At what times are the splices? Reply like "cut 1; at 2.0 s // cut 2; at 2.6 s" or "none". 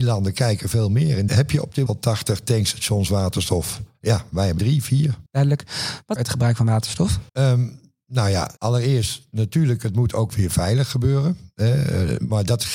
cut 1; at 1.3 s // cut 2; at 1.9 s // cut 3; at 3.9 s // cut 4; at 4.6 s // cut 5; at 5.3 s // cut 6; at 6.2 s // cut 7; at 7.3 s // cut 8; at 8.6 s